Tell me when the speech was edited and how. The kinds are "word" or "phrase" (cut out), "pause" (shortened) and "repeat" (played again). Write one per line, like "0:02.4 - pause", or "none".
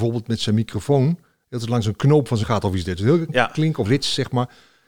0:02.4 - word
0:03.3 - word
0:03.8 - word